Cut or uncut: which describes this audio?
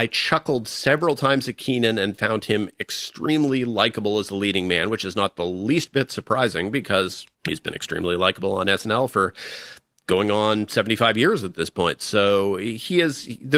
cut